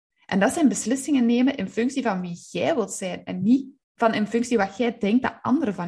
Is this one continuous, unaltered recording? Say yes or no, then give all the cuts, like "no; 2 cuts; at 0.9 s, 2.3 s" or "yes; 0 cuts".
no; 1 cut; at 3.8 s